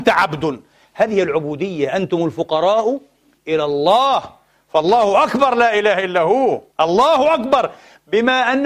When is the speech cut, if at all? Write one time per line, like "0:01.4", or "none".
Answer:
0:06.7